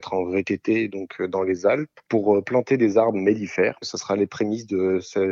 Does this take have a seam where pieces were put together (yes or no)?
no